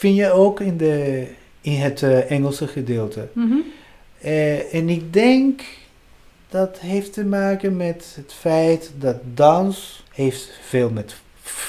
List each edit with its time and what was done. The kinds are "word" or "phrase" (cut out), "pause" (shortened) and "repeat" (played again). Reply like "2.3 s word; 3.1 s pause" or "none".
none